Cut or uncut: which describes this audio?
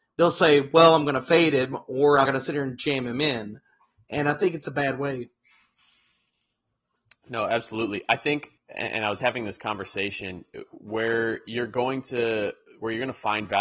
cut